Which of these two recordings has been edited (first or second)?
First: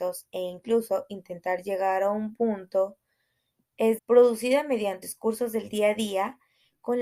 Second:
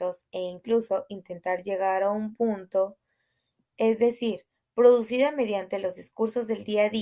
first